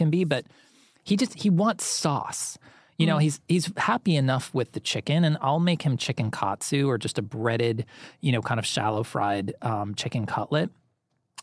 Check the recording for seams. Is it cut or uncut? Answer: uncut